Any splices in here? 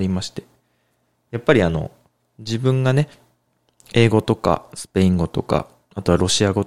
no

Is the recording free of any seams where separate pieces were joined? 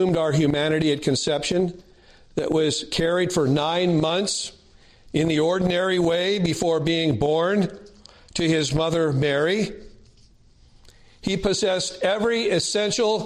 yes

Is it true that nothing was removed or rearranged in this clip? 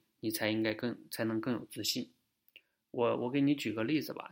yes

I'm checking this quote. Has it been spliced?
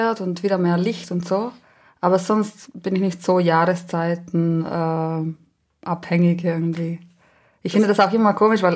no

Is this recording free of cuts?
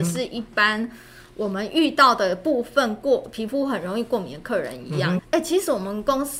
no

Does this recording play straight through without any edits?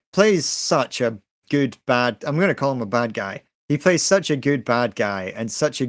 yes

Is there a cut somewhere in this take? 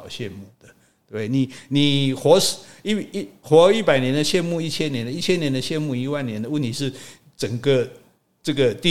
no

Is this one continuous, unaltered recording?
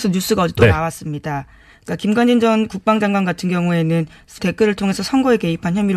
no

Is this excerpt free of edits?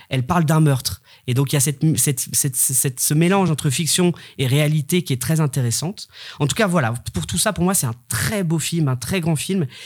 yes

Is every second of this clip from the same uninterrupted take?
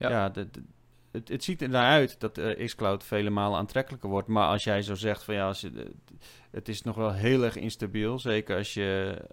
yes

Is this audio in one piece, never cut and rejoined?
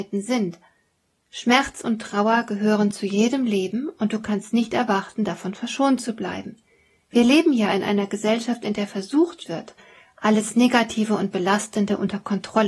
yes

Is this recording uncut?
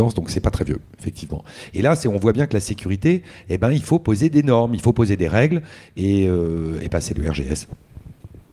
yes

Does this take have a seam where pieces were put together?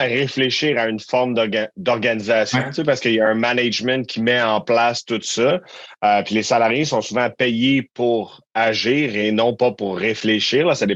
no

